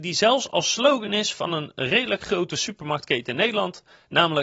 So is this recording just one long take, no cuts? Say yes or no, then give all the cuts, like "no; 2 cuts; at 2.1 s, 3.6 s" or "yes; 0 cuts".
yes; 0 cuts